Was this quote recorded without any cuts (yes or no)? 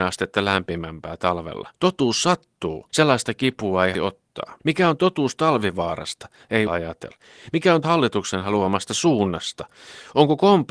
no